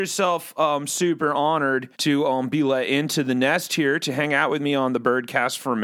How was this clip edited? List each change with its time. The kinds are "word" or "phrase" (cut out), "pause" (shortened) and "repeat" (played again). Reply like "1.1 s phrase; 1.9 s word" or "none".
1.9 s pause